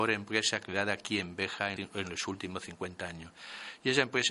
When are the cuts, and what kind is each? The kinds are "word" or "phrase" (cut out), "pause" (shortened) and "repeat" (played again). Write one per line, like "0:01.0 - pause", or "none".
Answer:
0:01.8 - word